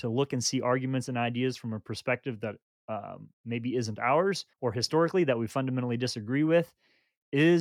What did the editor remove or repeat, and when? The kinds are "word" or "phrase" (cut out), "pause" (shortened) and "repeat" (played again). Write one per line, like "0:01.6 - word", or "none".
0:03.3 - pause
0:04.5 - pause